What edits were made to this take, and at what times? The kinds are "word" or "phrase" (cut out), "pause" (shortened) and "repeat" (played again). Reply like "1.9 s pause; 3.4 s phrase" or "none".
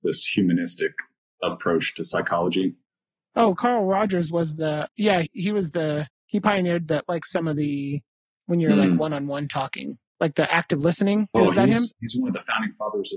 none